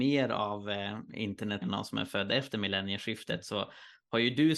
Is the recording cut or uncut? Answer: cut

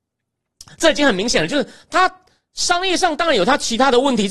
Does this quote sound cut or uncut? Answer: uncut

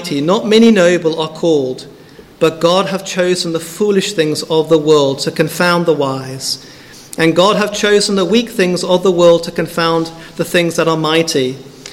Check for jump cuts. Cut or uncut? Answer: uncut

